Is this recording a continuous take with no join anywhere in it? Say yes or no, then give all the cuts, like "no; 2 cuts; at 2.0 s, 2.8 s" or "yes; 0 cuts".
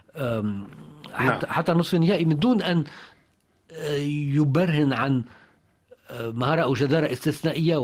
yes; 0 cuts